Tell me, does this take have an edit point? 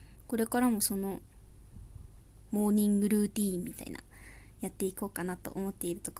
no; 0 cuts

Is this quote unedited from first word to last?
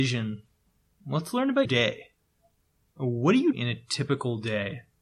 no; 2 cuts; at 1.6 s, 3.5 s

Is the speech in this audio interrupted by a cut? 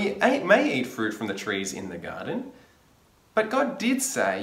no; 0 cuts

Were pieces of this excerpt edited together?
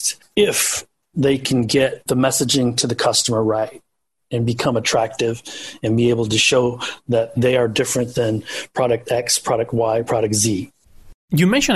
no; 0 cuts

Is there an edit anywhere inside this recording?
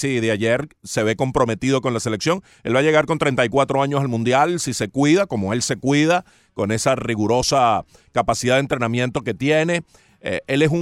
no; 0 cuts

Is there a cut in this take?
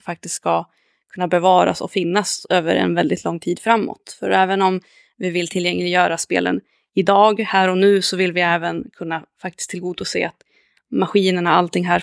no; 0 cuts

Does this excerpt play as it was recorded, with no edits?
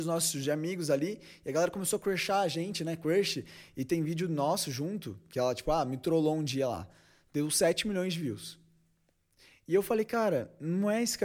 yes; 0 cuts

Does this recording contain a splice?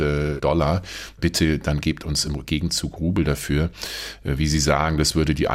no; 0 cuts

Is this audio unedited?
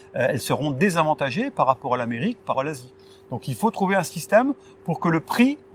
no; 1 cut; at 2.5 s

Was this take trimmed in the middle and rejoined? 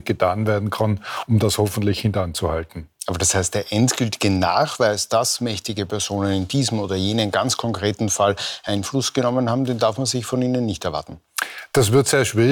no; 0 cuts

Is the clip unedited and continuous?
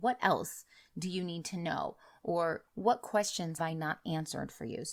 no; 1 cut; at 3.6 s

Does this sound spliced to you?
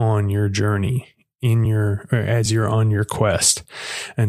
no; 0 cuts

